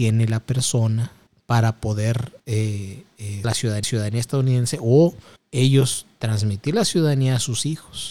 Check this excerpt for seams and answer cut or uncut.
cut